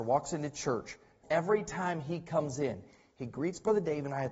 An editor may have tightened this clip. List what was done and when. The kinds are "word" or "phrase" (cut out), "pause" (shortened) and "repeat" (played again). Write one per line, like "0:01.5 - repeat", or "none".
0:01.2 - word